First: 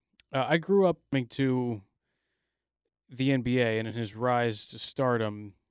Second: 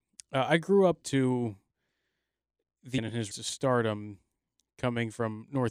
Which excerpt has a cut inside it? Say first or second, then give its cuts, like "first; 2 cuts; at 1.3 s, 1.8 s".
second; 3 cuts; at 1.0 s, 3.0 s, 3.3 s